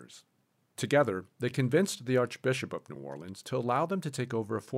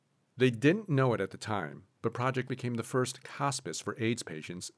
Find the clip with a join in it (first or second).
second